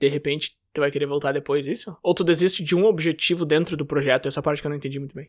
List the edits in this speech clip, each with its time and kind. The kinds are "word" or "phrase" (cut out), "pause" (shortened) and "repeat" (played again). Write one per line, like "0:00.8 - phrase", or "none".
none